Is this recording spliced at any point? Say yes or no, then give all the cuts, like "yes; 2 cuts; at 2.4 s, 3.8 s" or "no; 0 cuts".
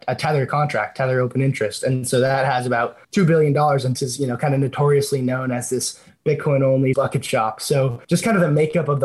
yes; 4 cuts; at 3.0 s, 4.0 s, 6.9 s, 8.0 s